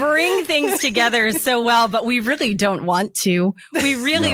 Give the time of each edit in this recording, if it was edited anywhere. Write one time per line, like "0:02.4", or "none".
none